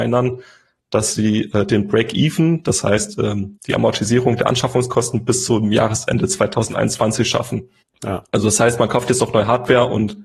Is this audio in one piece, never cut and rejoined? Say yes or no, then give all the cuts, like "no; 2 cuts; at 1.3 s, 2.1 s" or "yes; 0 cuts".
no; 2 cuts; at 3.6 s, 7.8 s